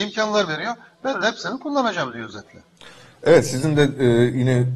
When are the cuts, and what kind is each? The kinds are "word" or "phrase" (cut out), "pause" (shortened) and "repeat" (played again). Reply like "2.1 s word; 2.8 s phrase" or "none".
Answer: none